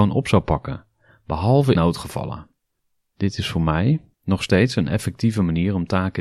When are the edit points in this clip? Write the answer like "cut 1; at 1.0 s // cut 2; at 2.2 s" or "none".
cut 1; at 1.7 s // cut 2; at 4.1 s